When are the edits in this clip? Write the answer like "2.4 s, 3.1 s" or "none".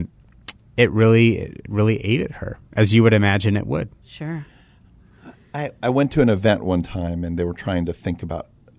4.0 s